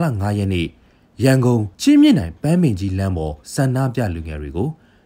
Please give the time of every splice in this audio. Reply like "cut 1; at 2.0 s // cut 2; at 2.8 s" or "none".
cut 1; at 1.7 s // cut 2; at 3.4 s